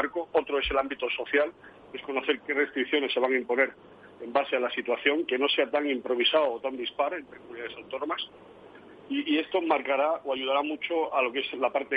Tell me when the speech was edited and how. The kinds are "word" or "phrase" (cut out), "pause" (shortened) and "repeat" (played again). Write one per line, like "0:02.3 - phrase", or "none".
0:02.4 - word